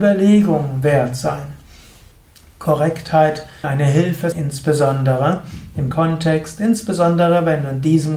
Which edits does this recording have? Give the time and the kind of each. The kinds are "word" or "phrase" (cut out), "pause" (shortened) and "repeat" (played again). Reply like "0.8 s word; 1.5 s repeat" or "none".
3.6 s word; 4.3 s word; 5.9 s word